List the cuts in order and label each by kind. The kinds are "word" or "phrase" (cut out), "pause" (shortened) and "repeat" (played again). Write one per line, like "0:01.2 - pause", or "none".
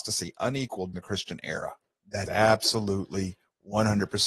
0:00.9 - word
0:02.3 - phrase

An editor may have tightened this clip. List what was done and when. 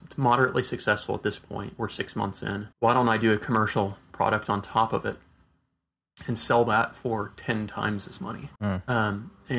0:02.7 - pause
0:08.2 - word
0:08.6 - pause

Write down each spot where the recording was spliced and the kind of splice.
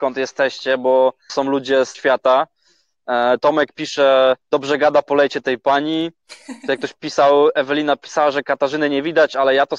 0:01.3 - word
0:01.9 - word
0:04.4 - pause

